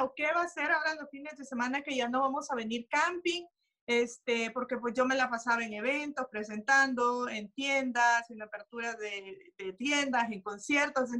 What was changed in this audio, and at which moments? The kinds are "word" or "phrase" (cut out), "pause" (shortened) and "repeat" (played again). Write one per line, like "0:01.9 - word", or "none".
none